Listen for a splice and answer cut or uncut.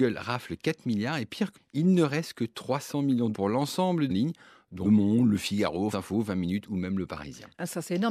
cut